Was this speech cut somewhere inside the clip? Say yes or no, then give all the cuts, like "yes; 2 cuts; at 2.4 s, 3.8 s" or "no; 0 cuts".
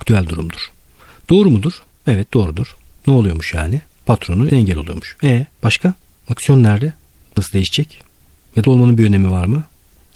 yes; 4 cuts; at 4.5 s, 5.6 s, 7.4 s, 8.6 s